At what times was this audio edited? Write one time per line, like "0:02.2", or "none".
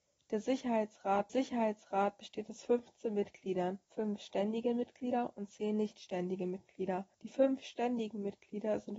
0:01.3
0:03.8
0:07.1